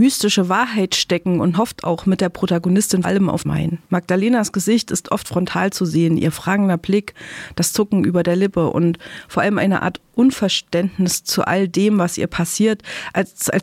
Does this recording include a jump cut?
yes; 4 cuts; at 1.5 s, 3.0 s, 3.4 s, 3.8 s

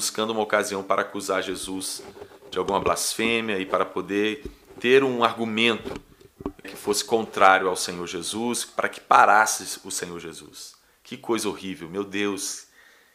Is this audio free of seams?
no; 2 cuts; at 6.6 s, 10.9 s

